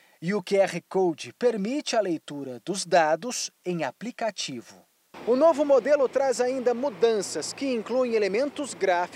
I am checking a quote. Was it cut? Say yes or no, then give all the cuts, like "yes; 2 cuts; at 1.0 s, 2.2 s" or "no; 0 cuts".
no; 0 cuts